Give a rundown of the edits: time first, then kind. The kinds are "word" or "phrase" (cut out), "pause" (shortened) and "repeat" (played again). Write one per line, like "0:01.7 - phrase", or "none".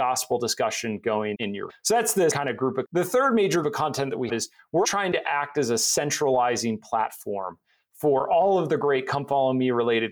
0:01.3 - word
0:01.7 - word
0:02.3 - word
0:02.8 - word
0:03.6 - word
0:04.3 - word
0:04.8 - word